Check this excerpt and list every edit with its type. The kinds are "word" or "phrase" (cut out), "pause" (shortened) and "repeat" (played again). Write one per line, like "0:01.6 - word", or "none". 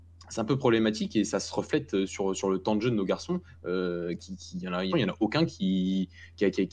0:04.9 - phrase